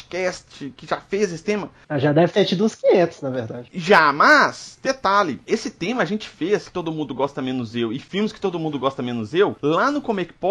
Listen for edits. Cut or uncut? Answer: cut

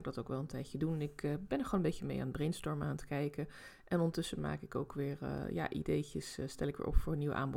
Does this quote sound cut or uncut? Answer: uncut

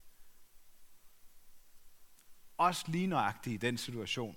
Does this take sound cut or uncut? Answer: uncut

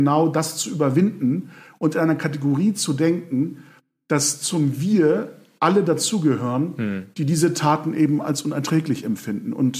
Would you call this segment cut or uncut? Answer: uncut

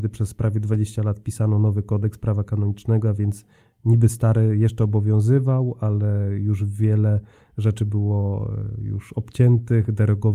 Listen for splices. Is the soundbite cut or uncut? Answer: uncut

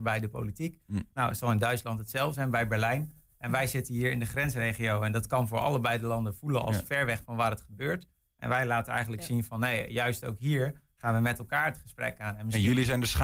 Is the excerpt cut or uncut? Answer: uncut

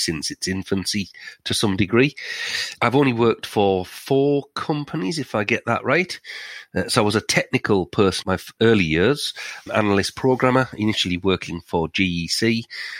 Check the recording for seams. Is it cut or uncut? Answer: cut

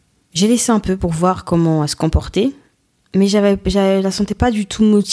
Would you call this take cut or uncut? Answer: uncut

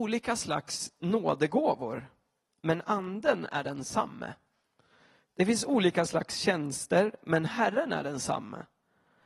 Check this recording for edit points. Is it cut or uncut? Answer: uncut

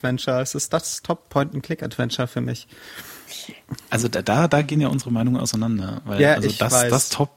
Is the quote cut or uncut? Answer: uncut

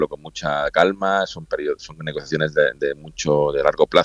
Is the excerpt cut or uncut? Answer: uncut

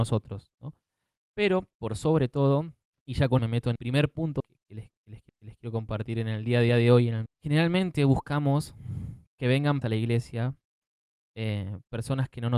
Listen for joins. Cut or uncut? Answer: cut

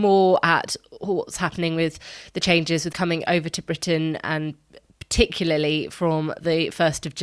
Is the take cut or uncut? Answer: cut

